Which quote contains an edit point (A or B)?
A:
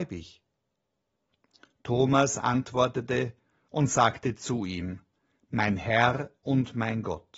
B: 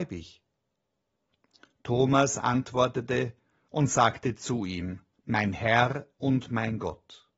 B